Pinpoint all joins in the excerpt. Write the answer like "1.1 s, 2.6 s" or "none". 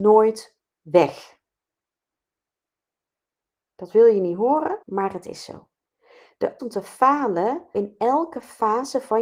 4.8 s, 6.6 s, 7.7 s